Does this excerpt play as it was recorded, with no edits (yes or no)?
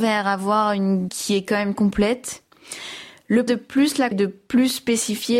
no